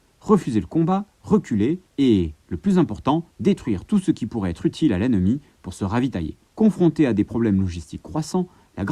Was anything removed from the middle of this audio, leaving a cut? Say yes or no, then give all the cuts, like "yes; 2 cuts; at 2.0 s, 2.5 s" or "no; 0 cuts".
yes; 3 cuts; at 1.9 s, 3.3 s, 6.5 s